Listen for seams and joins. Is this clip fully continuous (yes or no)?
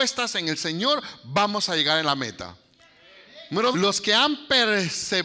no